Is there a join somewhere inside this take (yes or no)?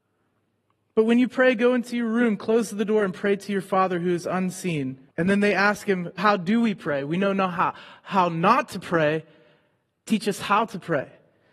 yes